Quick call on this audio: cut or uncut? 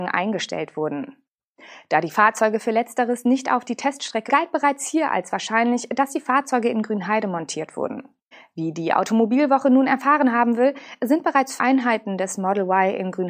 cut